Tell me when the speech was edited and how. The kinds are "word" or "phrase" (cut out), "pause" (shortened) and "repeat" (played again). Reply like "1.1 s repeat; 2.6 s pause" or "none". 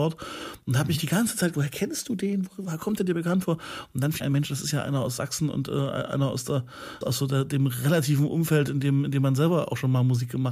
1.5 s word; 4.2 s word; 7.0 s word